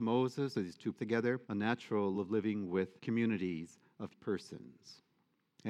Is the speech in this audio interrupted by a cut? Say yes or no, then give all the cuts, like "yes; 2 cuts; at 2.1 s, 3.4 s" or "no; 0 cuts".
yes; 5 cuts; at 0.9 s, 1.4 s, 2.1 s, 3.0 s, 4.1 s